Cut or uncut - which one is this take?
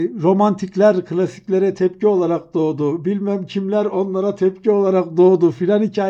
uncut